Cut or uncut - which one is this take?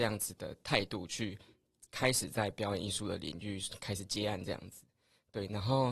uncut